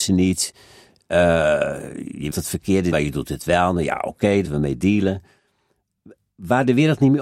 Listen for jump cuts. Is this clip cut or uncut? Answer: cut